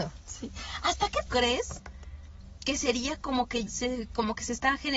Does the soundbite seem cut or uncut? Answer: cut